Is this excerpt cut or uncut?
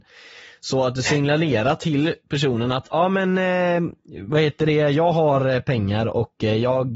uncut